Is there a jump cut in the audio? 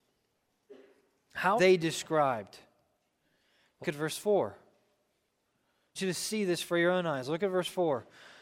yes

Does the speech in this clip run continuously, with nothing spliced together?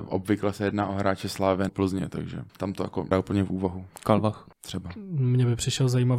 no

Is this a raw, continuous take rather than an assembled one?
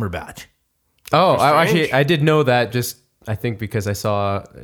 yes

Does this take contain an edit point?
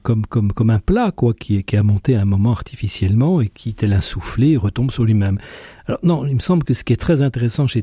no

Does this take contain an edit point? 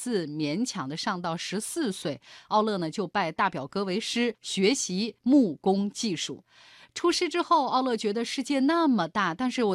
no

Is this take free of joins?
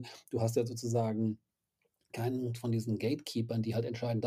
yes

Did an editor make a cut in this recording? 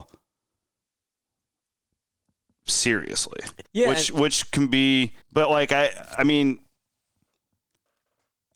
yes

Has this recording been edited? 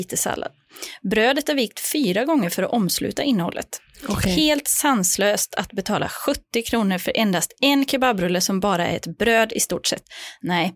no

